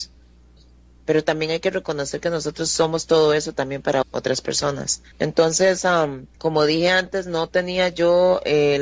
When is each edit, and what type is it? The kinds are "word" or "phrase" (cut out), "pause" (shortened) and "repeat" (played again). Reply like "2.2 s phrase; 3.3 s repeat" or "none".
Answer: 4.0 s word; 5.1 s pause; 6.3 s pause